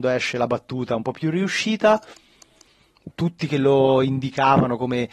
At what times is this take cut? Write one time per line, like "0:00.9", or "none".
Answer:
0:03.1